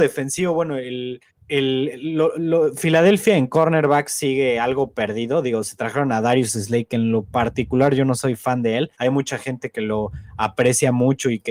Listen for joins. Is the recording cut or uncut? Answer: cut